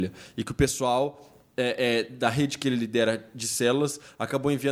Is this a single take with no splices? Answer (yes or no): yes